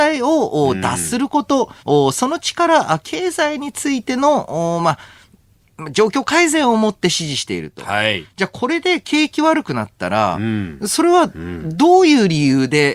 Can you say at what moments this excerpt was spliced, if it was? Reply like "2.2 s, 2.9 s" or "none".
1.8 s